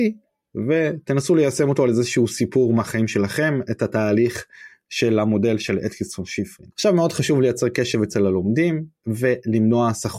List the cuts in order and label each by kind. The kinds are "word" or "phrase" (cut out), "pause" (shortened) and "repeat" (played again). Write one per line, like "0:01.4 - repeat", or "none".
0:06.7 - pause
0:09.0 - pause

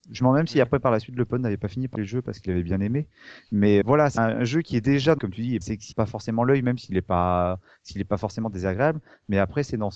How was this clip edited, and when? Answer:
0:01.9 - word
0:03.8 - word
0:04.2 - word
0:05.2 - word
0:05.6 - word
0:05.9 - word

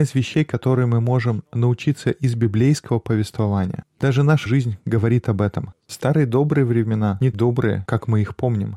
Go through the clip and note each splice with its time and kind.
0:04.0 - phrase
0:04.5 - word
0:07.3 - word

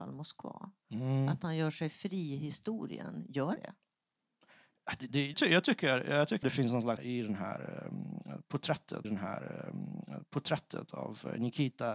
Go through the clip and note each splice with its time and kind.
0:03.6 - word
0:05.3 - word
0:06.4 - word
0:07.0 - word
0:09.0 - repeat

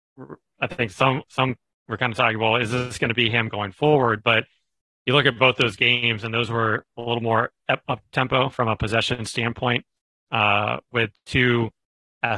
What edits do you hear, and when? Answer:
none

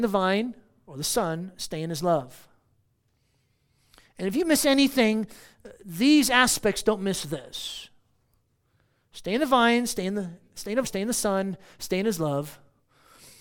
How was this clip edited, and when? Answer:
0:10.8 - word

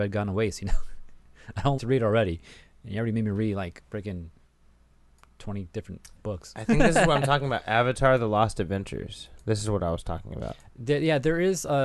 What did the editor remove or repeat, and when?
0:01.8 - word

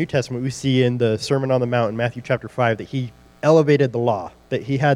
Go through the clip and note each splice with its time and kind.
none

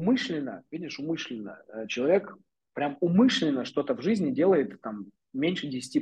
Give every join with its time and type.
none

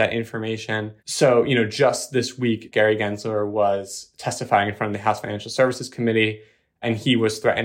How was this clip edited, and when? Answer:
0:01.0 - pause

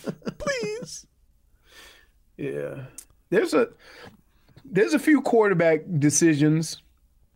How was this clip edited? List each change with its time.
none

